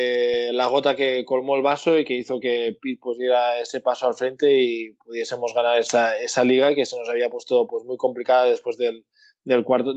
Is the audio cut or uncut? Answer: uncut